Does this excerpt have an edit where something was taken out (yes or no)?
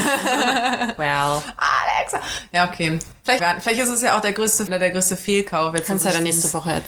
yes